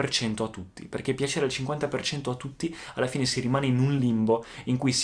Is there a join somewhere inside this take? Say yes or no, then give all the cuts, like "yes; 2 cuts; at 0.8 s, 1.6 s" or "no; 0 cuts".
no; 0 cuts